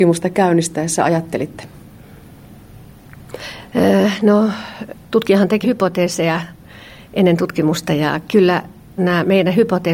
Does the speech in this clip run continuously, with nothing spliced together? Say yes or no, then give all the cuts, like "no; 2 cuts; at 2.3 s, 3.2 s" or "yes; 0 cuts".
no; 2 cuts; at 5.6 s, 9.0 s